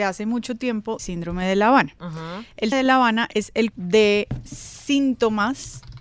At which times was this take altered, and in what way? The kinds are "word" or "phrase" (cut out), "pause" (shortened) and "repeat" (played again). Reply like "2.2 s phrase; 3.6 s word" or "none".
1.0 s word; 2.7 s word; 3.7 s word